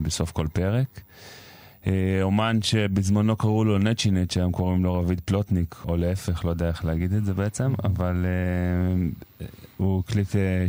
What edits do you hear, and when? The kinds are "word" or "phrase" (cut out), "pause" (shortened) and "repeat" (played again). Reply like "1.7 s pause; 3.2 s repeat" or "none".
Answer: 5.8 s word